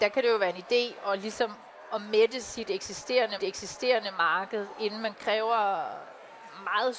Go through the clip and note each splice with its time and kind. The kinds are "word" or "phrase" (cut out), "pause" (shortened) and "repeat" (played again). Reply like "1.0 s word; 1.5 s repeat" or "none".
3.4 s repeat; 5.1 s phrase